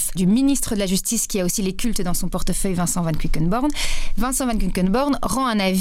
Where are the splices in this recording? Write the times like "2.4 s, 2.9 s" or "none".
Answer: none